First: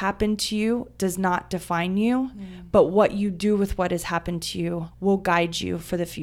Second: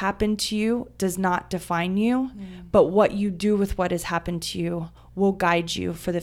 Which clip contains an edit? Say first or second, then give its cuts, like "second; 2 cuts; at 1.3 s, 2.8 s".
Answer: first; 1 cut; at 4.9 s